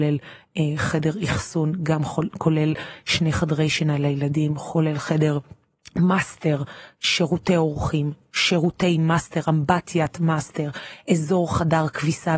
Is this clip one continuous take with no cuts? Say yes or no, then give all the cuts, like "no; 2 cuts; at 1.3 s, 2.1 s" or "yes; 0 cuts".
yes; 0 cuts